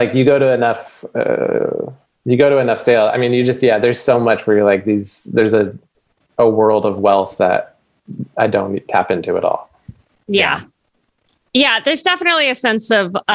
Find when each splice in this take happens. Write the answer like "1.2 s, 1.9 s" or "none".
none